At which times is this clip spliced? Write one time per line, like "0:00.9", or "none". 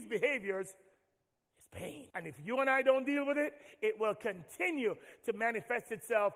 0:02.1